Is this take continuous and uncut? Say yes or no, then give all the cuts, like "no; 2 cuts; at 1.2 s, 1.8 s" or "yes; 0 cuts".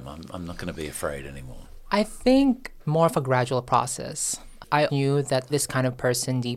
no; 3 cuts; at 2.8 s, 4.9 s, 5.5 s